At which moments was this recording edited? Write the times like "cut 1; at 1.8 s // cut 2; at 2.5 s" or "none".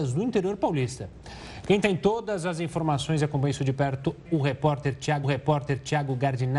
cut 1; at 4.3 s // cut 2; at 5.2 s